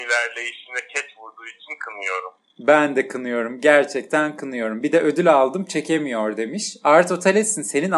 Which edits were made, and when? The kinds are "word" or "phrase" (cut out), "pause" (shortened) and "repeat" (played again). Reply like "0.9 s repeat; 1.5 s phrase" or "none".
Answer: none